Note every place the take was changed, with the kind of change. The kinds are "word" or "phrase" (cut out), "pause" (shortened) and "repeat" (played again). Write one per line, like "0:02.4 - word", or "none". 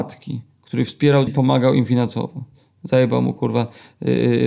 0:01.3 - word